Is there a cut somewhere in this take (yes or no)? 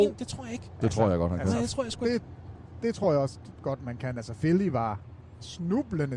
no